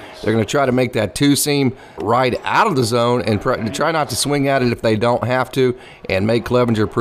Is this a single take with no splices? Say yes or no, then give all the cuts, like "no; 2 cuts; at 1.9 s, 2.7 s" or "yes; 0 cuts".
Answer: no; 1 cut; at 2.0 s